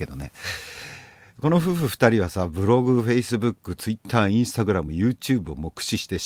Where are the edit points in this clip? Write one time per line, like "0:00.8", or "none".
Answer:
none

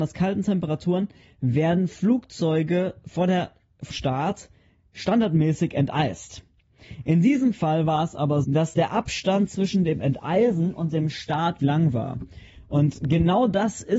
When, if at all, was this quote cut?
0:03.9
0:08.4
0:11.6

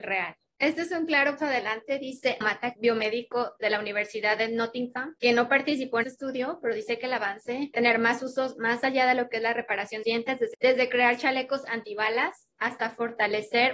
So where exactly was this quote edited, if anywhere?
0:01.4
0:02.4
0:02.8
0:06.0
0:07.7
0:10.0

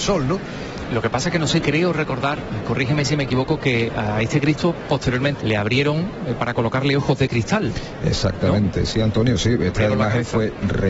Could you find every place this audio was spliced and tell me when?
0:01.6
0:03.9
0:05.4

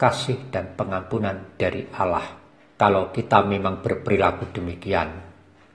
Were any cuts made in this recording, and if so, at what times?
0:02.5

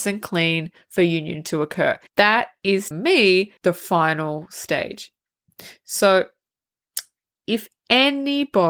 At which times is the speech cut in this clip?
0:02.1
0:02.9
0:03.6

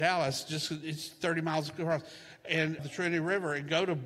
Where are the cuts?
0:02.8

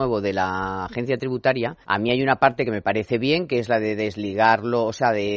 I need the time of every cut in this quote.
0:01.8

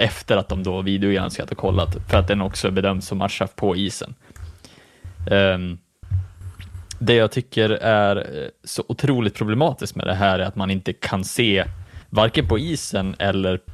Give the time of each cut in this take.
0:12.0

